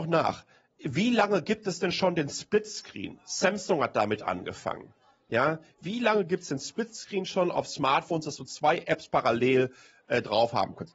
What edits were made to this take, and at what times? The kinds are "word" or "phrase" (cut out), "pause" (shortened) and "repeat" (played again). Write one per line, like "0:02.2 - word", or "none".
none